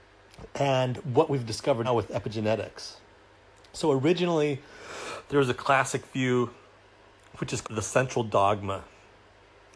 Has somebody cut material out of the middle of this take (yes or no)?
yes